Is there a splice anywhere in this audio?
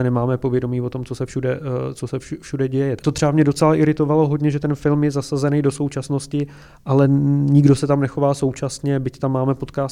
no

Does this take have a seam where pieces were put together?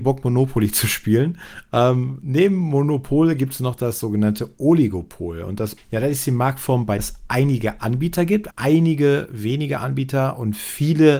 yes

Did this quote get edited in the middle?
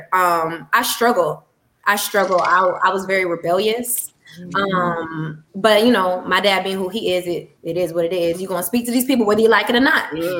yes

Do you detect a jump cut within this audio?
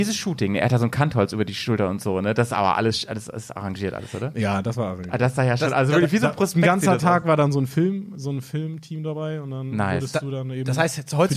no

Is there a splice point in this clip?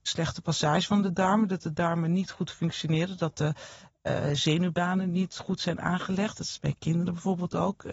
no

